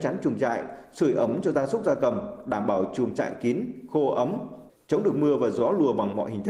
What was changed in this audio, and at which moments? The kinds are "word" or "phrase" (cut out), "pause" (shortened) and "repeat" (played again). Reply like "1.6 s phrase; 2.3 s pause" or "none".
none